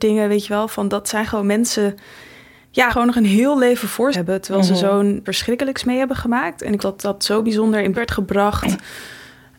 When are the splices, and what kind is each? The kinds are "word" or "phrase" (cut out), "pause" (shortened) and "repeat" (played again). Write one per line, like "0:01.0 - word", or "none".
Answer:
0:02.9 - word
0:04.1 - word
0:05.3 - word
0:06.8 - word
0:07.9 - word